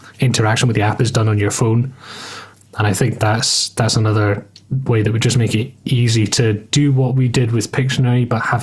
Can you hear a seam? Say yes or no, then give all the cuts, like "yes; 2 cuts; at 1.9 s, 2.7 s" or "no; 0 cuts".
no; 0 cuts